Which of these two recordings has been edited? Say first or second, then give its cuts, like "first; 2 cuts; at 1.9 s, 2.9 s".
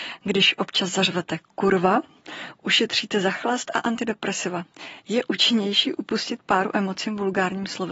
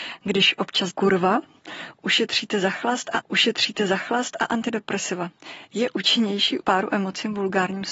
second; 3 cuts; at 0.9 s, 3.2 s, 6.6 s